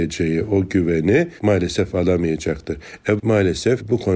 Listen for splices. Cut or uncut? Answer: cut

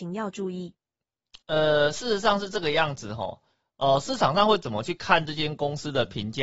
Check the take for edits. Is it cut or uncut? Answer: cut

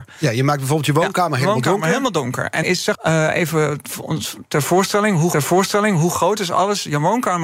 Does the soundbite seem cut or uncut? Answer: cut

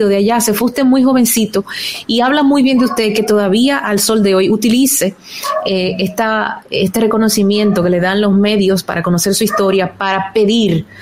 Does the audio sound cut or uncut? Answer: uncut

